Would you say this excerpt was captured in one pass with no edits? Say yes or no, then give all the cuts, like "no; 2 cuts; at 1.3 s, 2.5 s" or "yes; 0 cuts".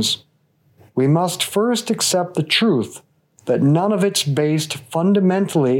yes; 0 cuts